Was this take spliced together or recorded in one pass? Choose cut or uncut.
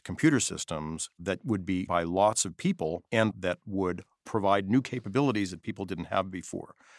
cut